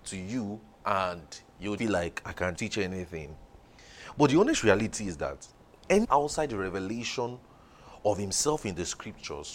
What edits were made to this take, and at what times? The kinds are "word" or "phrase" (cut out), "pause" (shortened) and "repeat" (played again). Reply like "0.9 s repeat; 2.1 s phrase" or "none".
1.8 s word; 2.2 s word; 2.5 s word; 6.0 s phrase